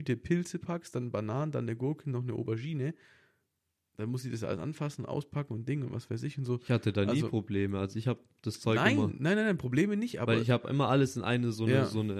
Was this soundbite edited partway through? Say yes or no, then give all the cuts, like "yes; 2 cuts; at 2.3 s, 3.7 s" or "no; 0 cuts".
no; 0 cuts